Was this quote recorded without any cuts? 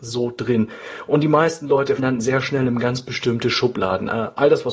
no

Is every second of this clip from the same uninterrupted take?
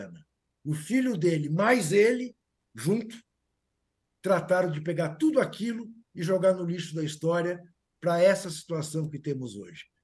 yes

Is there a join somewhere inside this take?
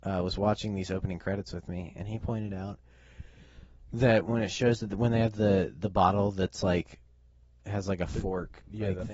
no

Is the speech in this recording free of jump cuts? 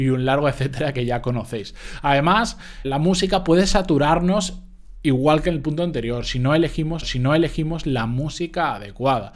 no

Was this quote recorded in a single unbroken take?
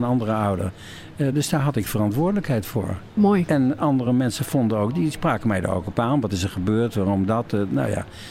yes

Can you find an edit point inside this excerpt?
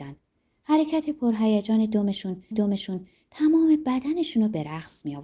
yes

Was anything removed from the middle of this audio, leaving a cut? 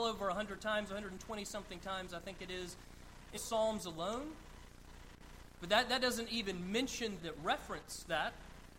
yes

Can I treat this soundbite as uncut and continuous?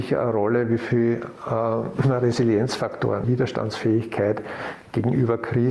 no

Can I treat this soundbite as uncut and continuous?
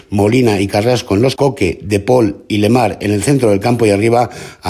no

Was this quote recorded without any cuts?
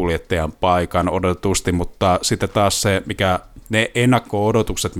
yes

